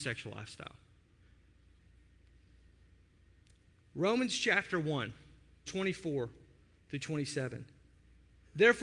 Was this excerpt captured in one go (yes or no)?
no